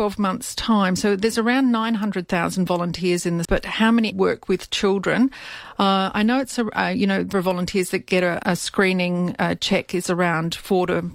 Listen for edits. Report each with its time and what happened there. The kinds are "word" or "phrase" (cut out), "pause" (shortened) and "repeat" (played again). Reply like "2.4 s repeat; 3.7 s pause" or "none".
3.4 s word; 4.1 s word; 7.3 s word; 8.4 s word